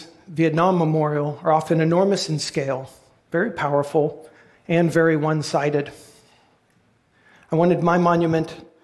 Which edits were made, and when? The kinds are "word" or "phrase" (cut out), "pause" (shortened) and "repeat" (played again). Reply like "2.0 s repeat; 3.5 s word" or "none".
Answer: none